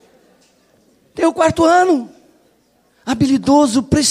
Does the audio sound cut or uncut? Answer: uncut